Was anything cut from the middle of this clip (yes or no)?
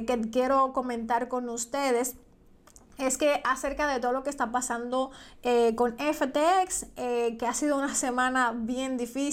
no